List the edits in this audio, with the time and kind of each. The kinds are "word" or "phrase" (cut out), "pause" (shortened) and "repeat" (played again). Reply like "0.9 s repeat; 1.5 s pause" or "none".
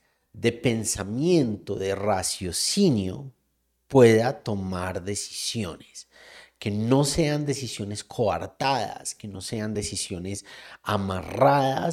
none